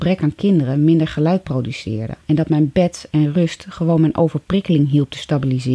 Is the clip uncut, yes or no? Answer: no